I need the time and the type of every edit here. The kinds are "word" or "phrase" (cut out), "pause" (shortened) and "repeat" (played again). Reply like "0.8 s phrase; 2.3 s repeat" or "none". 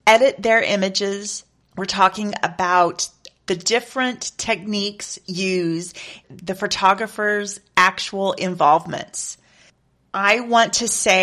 1.6 s pause; 3.5 s word; 6.2 s word